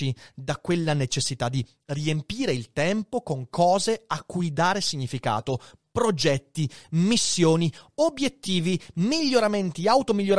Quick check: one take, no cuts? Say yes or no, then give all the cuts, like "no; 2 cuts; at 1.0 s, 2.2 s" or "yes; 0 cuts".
yes; 0 cuts